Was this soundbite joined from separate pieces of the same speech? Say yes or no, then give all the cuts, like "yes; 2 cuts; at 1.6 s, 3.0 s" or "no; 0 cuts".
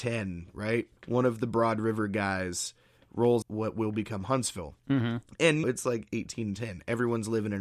yes; 4 cuts; at 1.0 s, 3.4 s, 4.8 s, 5.6 s